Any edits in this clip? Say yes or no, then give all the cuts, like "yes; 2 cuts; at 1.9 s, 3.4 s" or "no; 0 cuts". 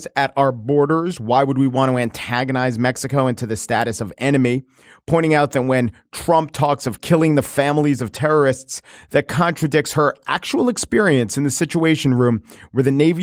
no; 0 cuts